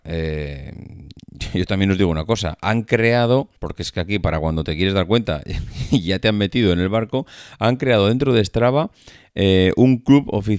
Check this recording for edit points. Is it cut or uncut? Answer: cut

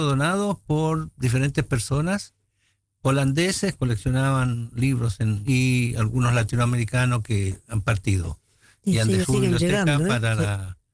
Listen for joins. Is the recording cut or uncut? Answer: cut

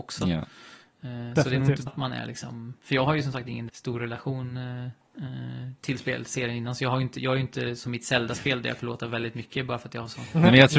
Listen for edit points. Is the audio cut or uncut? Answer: cut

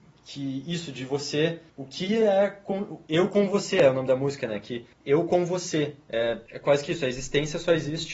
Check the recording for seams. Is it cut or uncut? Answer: cut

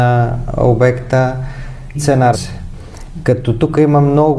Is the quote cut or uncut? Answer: cut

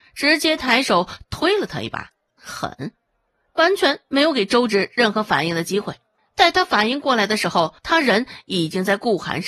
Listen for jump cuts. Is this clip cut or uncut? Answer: cut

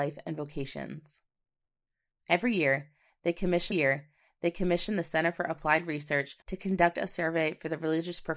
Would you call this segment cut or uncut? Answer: cut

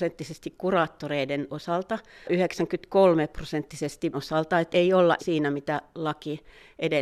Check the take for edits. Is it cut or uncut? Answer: cut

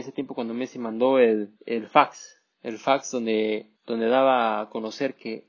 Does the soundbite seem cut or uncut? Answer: cut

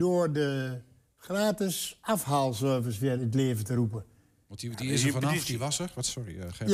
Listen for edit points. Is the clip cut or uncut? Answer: uncut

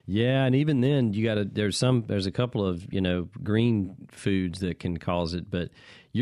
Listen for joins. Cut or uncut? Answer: uncut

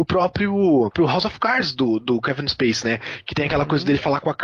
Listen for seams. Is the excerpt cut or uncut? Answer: uncut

